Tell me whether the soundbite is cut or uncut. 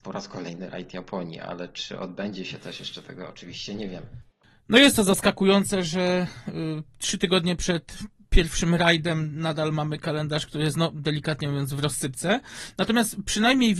uncut